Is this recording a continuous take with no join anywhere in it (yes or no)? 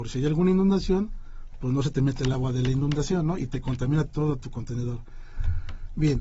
yes